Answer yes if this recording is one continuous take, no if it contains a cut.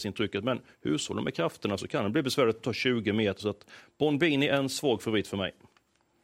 yes